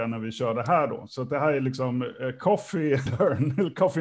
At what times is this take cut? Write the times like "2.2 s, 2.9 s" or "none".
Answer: 3.1 s